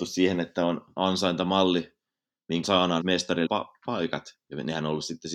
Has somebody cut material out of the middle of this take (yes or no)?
yes